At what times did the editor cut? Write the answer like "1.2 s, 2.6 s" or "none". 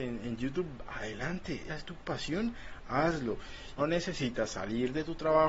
1.7 s, 3.8 s

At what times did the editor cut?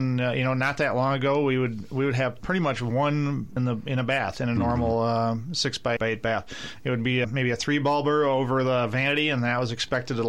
3.6 s, 6.0 s, 7.2 s

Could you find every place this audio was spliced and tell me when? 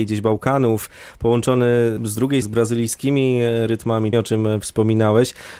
2.0 s, 2.4 s, 4.1 s

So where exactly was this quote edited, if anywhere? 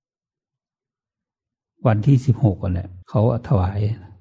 3.0 s

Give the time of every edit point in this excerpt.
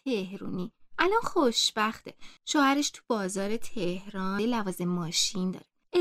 4.4 s

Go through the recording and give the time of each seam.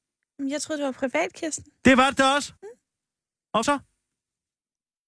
2.6 s, 3.6 s

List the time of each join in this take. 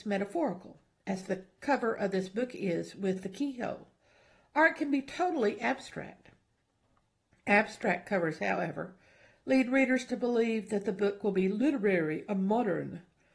none

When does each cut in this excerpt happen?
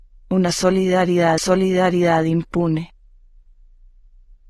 1.4 s

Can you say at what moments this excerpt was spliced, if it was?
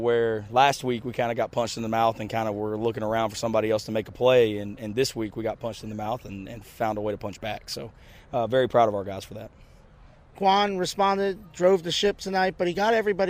none

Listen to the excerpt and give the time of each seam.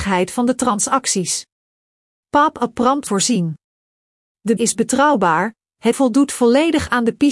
3.1 s, 4.6 s, 5.9 s

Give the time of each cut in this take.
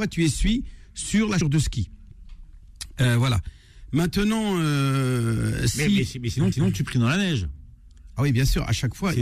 1.4 s, 6.5 s

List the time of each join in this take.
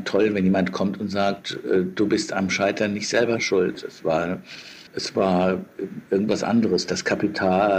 4.9 s

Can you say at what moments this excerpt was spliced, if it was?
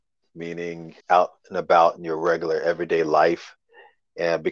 1.0 s

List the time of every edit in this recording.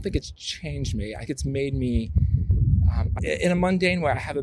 1.3 s, 3.2 s

